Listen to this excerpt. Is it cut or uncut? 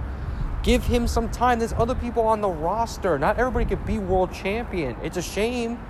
uncut